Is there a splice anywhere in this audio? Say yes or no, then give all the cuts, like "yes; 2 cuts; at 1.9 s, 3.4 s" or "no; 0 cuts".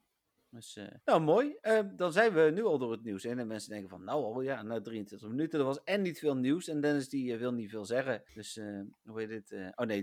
yes; 2 cuts; at 1.0 s, 8.3 s